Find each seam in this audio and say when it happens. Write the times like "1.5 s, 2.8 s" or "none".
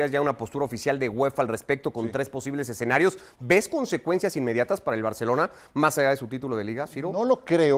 none